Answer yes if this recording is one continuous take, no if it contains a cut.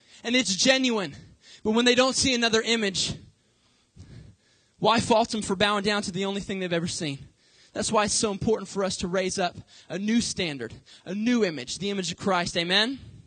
yes